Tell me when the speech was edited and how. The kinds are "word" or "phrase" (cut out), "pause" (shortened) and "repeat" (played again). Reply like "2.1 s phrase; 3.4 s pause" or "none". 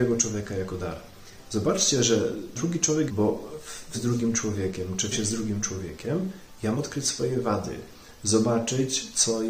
2.5 s word; 3.1 s phrase; 3.9 s word; 5.1 s word; 6.7 s word